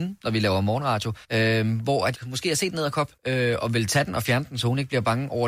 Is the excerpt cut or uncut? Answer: cut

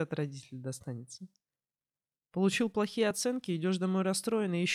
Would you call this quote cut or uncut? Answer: uncut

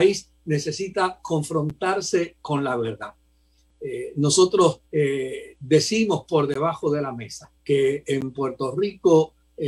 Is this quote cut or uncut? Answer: cut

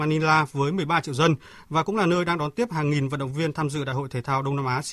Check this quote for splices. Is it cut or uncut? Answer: uncut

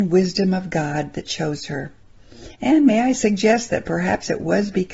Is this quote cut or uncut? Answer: cut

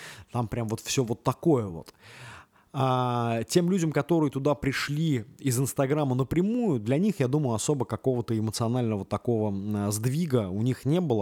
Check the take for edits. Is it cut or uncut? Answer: uncut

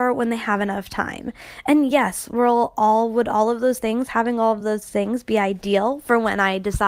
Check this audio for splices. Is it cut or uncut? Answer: uncut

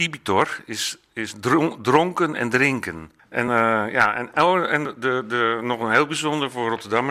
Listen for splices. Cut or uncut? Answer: uncut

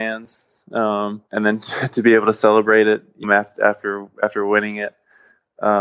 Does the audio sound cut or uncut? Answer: cut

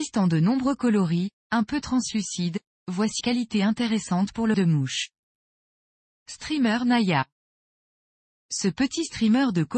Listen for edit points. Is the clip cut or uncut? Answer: cut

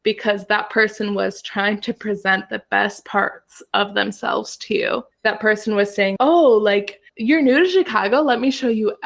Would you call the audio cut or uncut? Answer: cut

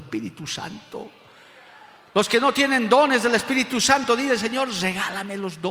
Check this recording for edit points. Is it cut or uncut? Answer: uncut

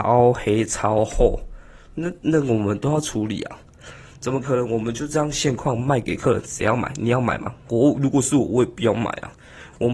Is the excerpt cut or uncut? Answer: cut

